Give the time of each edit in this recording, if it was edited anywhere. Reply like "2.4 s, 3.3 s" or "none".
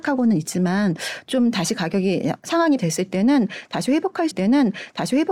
2.8 s, 4.3 s